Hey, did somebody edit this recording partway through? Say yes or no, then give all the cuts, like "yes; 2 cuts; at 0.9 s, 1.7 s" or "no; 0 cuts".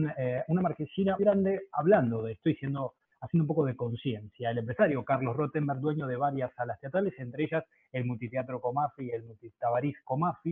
yes; 1 cut; at 1.2 s